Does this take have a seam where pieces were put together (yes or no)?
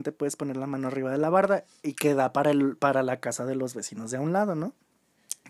no